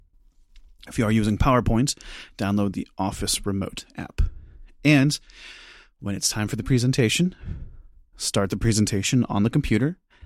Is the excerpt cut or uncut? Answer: uncut